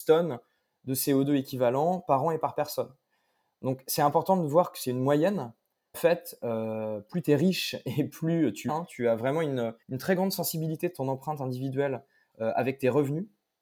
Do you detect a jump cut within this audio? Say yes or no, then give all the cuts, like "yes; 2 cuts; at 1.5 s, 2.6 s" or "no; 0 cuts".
yes; 3 cuts; at 5.9 s, 8.7 s, 9.8 s